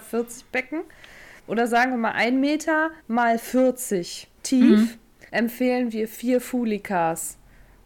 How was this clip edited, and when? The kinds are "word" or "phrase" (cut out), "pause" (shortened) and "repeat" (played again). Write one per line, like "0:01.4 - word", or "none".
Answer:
0:01.4 - pause
0:03.0 - pause
0:04.4 - pause
0:05.3 - pause